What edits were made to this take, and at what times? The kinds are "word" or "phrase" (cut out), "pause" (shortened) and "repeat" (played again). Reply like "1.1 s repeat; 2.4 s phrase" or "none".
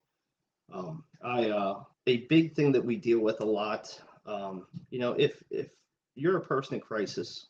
1.1 s pause; 1.9 s pause; 4.8 s pause